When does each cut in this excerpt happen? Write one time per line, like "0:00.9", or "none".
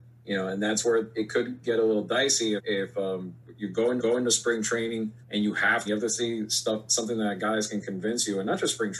0:02.6
0:04.0
0:05.2
0:05.9